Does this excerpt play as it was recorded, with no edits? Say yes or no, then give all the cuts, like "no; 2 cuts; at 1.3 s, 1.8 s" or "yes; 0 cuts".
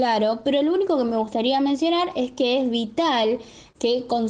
yes; 0 cuts